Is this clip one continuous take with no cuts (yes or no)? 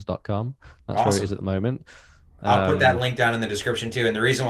yes